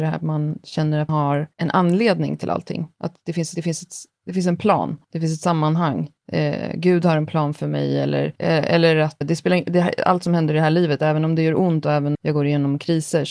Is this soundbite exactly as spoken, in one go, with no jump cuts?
no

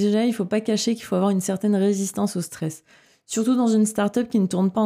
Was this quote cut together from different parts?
no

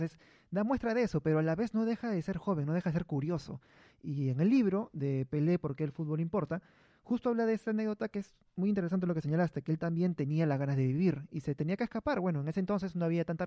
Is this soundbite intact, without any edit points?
yes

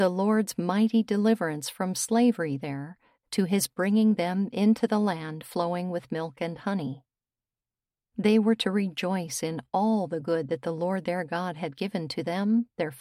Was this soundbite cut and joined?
no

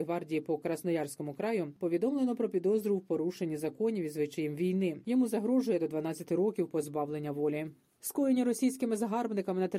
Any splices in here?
no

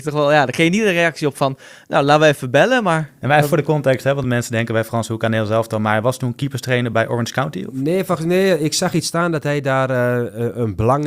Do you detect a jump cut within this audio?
no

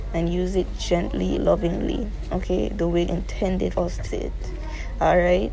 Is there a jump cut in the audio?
yes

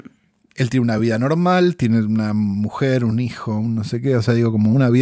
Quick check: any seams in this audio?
no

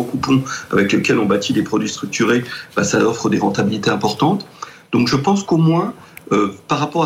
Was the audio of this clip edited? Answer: no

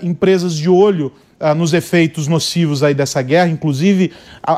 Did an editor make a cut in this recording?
no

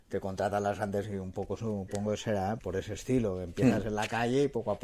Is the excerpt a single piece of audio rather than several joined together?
no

